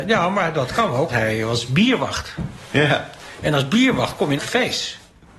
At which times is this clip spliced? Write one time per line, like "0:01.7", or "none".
0:01.1
0:04.4